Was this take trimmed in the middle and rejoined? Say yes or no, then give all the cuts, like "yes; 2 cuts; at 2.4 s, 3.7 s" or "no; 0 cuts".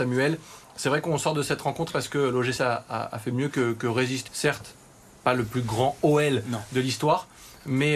yes; 3 cuts; at 1.9 s, 2.6 s, 4.3 s